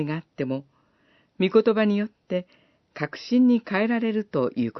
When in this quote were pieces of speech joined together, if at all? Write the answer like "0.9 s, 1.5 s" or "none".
none